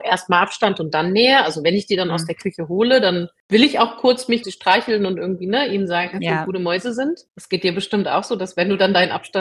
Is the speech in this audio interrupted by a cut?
yes; 1 cut; at 4.4 s

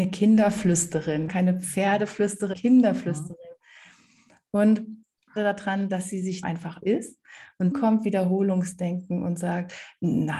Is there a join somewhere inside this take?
yes; 6 cuts; at 1.3 s, 2.5 s, 5.4 s, 6.4 s, 6.8 s, 7.7 s

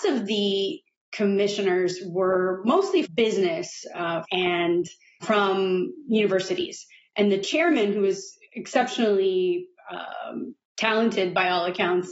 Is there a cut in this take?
yes; 4 cuts; at 3.0 s, 4.2 s, 5.2 s, 8.5 s

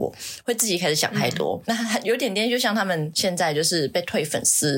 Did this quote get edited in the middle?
yes; 1 cut; at 1.6 s

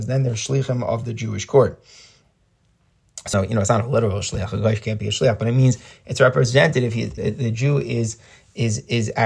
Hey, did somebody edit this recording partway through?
yes; 2 cuts; at 3.3 s, 7.2 s

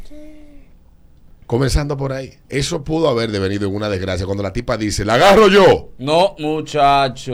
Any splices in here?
yes; 1 cut; at 2.4 s

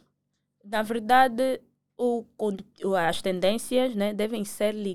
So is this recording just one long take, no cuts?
yes; 0 cuts

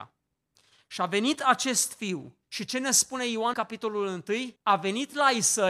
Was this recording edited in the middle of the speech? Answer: yes; 3 cuts; at 2.4 s, 3.5 s, 4.6 s

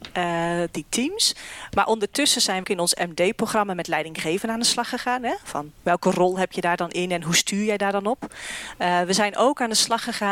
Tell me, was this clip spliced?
yes; 2 cuts; at 2.6 s, 5.8 s

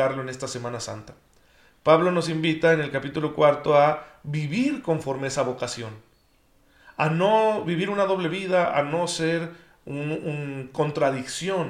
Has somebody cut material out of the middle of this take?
no; 0 cuts

